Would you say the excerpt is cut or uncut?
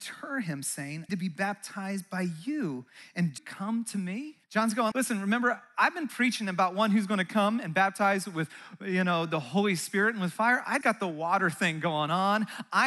cut